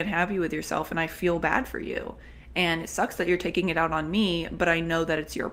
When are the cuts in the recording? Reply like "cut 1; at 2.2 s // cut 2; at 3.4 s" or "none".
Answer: none